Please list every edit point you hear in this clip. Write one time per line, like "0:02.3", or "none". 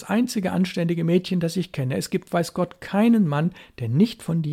none